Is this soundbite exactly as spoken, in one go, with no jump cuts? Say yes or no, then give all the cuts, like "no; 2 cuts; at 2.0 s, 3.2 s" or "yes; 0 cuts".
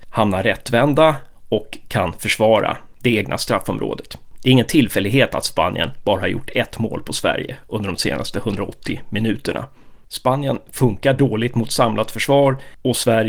no; 1 cut; at 10.0 s